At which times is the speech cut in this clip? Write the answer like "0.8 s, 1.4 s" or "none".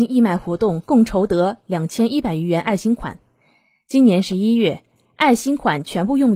none